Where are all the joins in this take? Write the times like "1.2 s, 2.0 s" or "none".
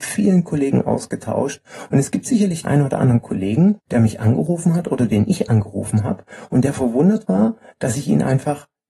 2.6 s, 3.8 s